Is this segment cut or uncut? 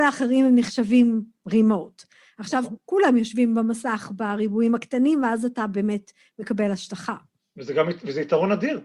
uncut